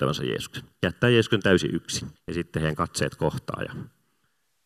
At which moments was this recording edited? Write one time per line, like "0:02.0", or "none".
0:02.2